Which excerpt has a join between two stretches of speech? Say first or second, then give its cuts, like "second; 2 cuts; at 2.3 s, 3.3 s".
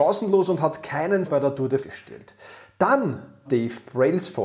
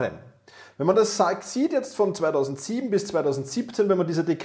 first; 3 cuts; at 1.2 s, 1.8 s, 3.4 s